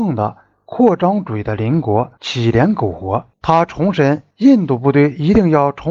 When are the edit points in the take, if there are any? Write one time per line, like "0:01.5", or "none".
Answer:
0:03.3
0:04.3